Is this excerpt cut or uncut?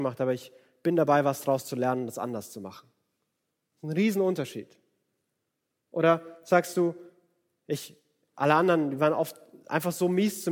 uncut